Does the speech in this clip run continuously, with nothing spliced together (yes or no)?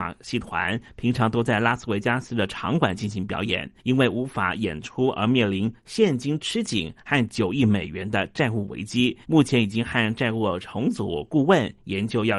no